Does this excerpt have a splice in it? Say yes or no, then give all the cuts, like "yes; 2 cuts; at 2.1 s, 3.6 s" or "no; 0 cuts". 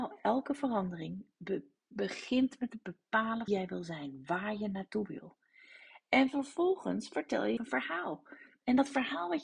yes; 2 cuts; at 3.5 s, 7.6 s